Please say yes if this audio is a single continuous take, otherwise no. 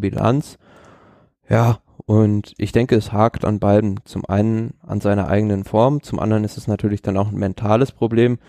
yes